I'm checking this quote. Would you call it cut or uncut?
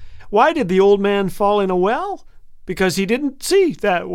uncut